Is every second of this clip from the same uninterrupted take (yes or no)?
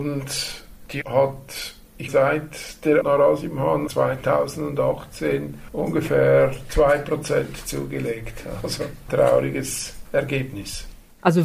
no